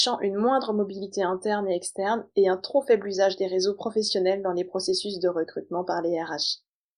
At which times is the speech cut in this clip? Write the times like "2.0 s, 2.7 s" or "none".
none